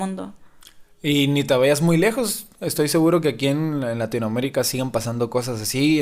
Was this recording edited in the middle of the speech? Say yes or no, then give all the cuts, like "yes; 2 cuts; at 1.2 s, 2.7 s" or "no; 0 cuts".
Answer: no; 0 cuts